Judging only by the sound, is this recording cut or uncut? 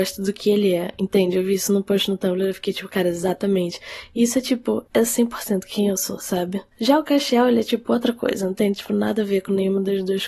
cut